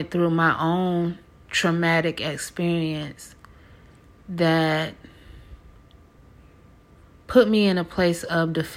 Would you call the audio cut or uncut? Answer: uncut